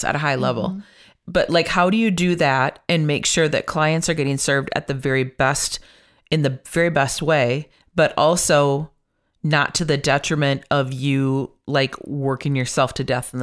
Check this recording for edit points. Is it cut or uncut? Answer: uncut